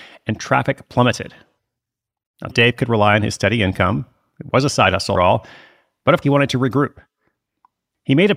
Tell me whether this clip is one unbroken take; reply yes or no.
no